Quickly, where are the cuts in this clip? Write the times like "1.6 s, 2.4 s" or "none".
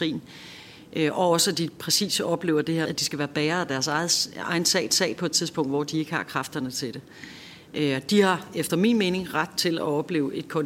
2.8 s, 4.9 s